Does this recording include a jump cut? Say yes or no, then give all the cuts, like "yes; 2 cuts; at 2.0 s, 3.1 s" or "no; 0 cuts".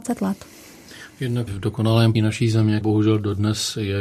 yes; 3 cuts; at 1.5 s, 2.1 s, 2.8 s